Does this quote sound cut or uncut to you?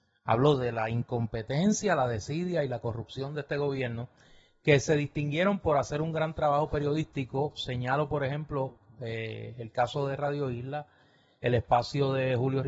uncut